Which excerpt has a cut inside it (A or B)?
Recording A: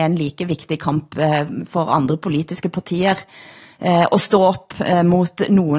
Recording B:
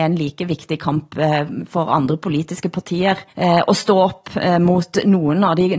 B